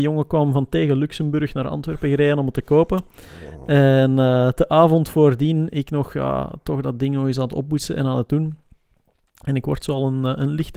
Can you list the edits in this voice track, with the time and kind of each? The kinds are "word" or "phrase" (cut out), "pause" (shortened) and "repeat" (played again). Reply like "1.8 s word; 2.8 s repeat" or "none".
none